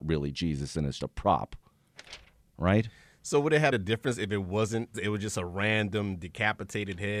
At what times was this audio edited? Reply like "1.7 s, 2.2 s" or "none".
1.0 s, 3.7 s, 4.9 s